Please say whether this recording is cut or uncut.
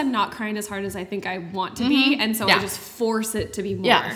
uncut